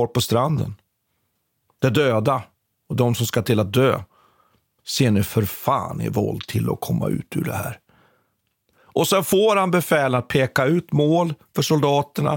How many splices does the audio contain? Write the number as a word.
zero